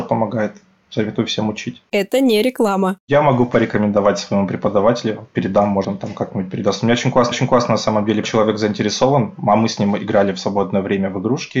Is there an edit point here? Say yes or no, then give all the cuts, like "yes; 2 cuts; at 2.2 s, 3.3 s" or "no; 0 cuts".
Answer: yes; 3 cuts; at 5.8 s, 7.3 s, 8.2 s